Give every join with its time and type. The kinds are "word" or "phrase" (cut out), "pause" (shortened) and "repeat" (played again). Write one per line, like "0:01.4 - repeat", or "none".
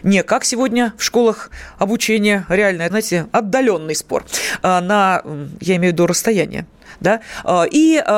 0:02.9 - word